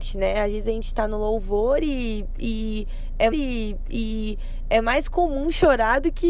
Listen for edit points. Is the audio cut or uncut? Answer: cut